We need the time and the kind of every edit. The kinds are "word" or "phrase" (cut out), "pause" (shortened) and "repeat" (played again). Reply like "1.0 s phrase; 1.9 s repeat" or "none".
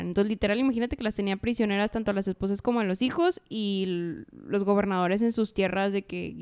none